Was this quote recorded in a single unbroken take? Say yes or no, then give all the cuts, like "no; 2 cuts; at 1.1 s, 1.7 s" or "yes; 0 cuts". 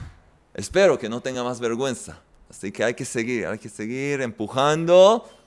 yes; 0 cuts